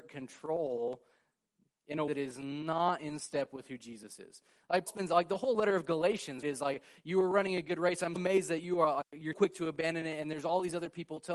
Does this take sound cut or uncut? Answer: cut